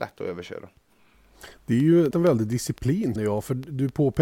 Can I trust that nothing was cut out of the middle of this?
no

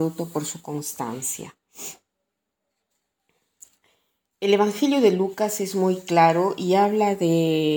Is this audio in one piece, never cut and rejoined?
yes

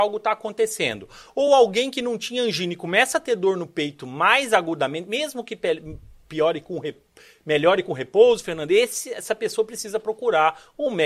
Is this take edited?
no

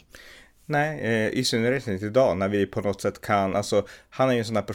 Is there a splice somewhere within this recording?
no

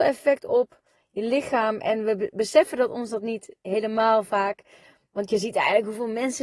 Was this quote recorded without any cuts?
yes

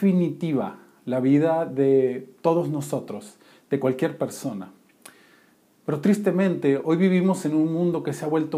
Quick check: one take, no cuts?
yes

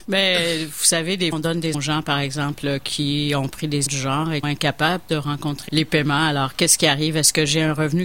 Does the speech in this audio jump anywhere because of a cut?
yes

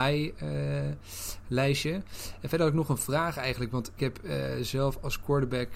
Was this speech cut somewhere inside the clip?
yes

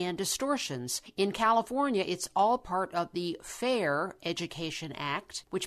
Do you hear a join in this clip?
no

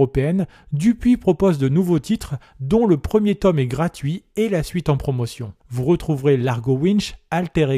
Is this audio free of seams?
no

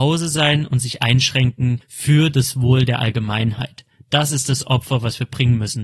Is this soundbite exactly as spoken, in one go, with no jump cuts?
yes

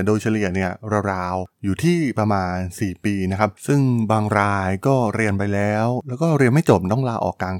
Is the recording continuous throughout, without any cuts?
no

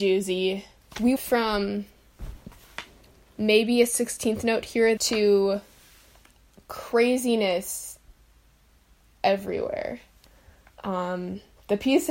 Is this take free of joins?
no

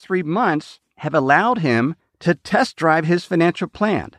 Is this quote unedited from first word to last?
yes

